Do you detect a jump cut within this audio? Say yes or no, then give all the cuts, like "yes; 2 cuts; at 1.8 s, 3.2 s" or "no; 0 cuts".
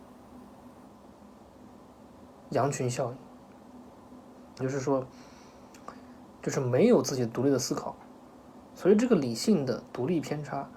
yes; 1 cut; at 4.6 s